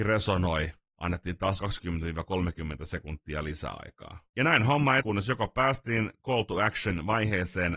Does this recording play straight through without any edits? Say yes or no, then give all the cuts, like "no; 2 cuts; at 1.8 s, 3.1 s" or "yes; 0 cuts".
no; 3 cuts; at 1.6 s, 4.3 s, 5.0 s